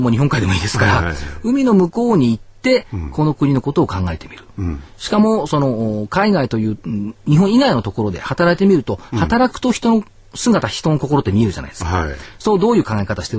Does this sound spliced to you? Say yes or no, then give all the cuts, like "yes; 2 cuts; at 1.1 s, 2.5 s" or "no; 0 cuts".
no; 0 cuts